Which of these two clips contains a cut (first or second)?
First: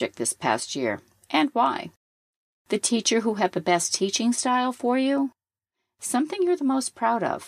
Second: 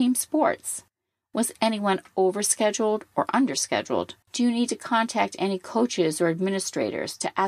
second